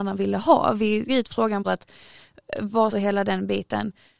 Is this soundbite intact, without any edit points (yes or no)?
no